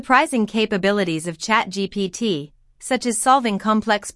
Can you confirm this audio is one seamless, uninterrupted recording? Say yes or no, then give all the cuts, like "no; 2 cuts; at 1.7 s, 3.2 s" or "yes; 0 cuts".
yes; 0 cuts